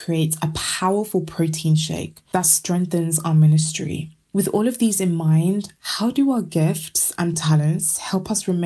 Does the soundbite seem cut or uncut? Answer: uncut